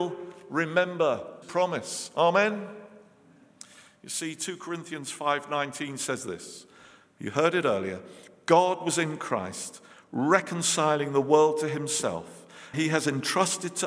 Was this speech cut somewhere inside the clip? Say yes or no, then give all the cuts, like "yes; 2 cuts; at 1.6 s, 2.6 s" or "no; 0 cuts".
yes; 2 cuts; at 1.4 s, 12.7 s